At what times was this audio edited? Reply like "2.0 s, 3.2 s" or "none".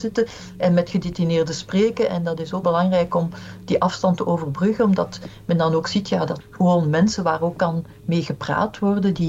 2.6 s, 6.4 s